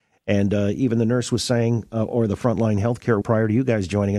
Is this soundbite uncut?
no; 1 cut; at 3.2 s

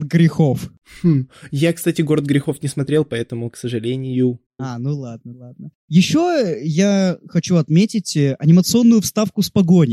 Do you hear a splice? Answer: no; 0 cuts

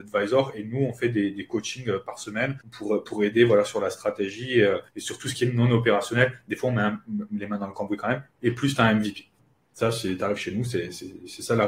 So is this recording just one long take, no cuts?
no; 3 cuts; at 2.6 s, 4.9 s, 9.4 s

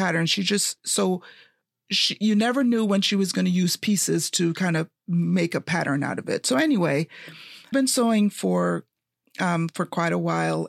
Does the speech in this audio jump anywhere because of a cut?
yes; 1 cut; at 7.7 s

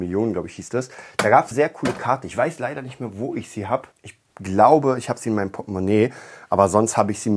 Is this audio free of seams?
no; 2 cuts; at 1.5 s, 3.9 s

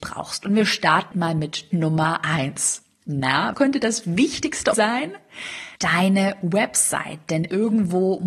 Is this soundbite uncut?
no; 4 cuts; at 1.1 s, 1.7 s, 3.5 s, 4.7 s

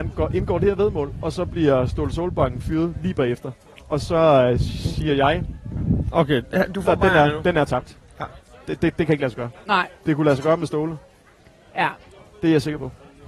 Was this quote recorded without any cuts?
no; 1 cut; at 6.1 s

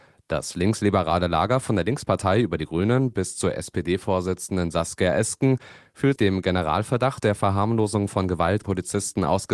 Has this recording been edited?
yes; 2 cuts; at 6.2 s, 8.6 s

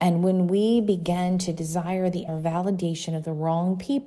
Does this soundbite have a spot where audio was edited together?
yes; 1 cut; at 2.3 s

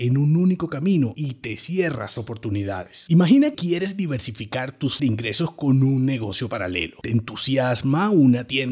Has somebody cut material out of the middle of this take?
yes; 3 cuts; at 2.2 s, 3.5 s, 5.0 s

